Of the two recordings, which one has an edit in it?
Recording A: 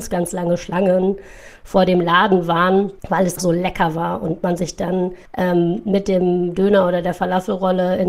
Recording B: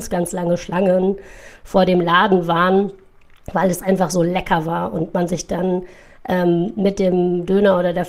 A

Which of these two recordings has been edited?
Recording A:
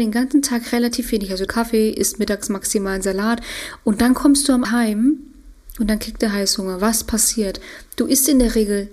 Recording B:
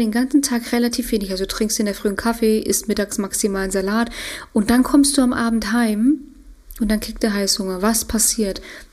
A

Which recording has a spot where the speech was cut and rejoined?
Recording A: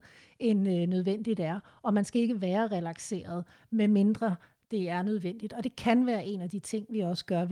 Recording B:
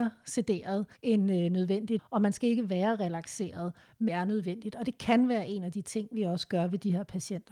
B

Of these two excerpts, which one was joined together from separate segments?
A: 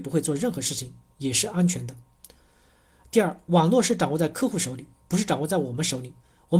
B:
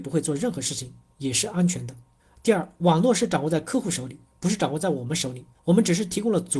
B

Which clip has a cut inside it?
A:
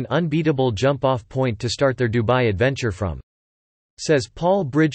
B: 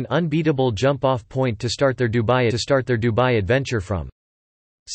B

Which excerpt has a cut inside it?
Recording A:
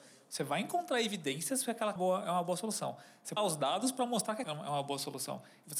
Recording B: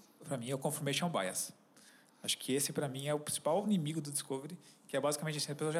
A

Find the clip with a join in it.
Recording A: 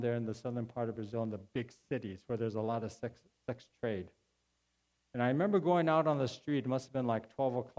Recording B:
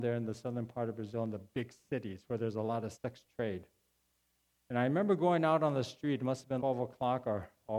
B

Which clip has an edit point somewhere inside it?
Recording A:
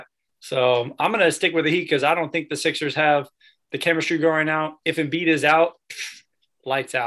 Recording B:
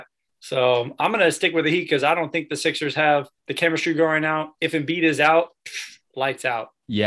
B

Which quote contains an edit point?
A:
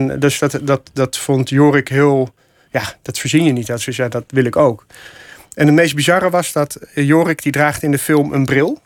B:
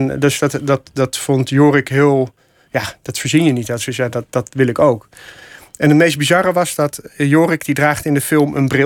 A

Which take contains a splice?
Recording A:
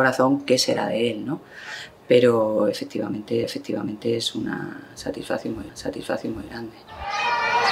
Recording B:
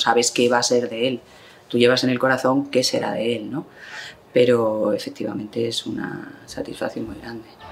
A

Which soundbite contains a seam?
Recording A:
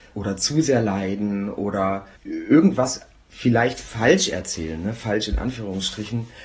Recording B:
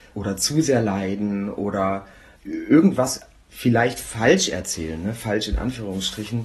A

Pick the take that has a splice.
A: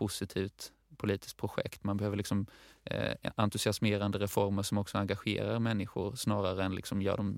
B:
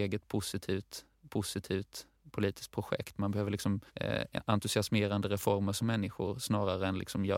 B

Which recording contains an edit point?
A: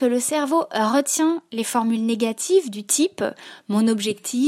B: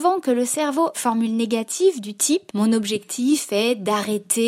B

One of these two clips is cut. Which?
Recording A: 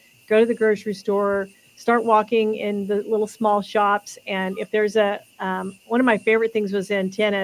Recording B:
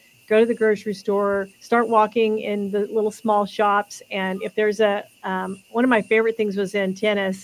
B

